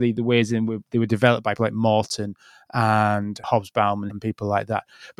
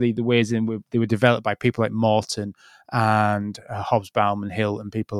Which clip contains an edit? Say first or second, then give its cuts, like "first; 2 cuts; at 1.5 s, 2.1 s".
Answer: first; 3 cuts; at 1.6 s, 3.4 s, 4.1 s